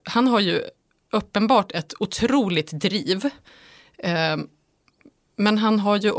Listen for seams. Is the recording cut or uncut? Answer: uncut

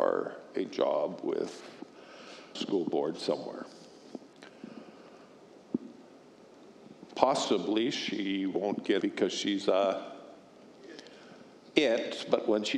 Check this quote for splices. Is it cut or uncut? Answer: cut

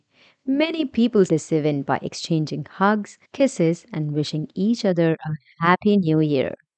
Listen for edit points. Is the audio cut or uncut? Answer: cut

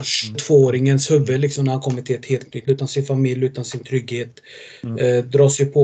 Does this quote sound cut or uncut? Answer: cut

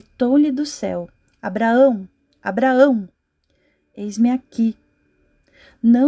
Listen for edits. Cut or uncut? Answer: uncut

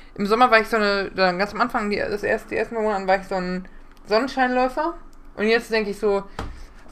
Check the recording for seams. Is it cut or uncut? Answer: uncut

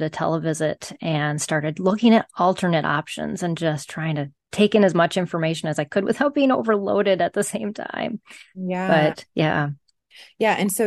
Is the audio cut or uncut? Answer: uncut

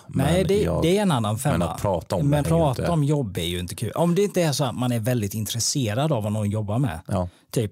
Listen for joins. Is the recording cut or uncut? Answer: cut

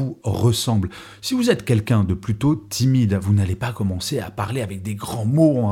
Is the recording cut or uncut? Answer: uncut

